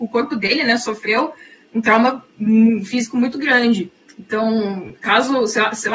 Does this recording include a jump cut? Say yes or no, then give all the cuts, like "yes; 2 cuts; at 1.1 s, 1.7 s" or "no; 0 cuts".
no; 0 cuts